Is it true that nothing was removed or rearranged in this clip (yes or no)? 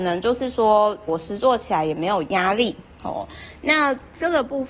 no